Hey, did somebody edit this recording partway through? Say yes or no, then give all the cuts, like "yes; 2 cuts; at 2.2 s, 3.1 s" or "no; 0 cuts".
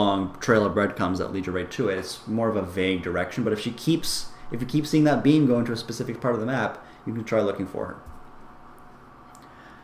no; 0 cuts